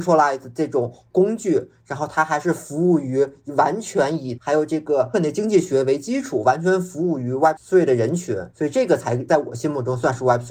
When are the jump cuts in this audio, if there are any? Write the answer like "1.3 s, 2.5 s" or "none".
4.4 s, 5.1 s